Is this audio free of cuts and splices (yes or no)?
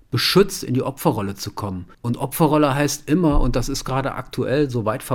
no